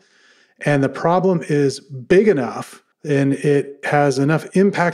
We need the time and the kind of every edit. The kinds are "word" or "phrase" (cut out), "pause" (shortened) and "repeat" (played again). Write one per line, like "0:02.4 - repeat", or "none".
0:02.9 - pause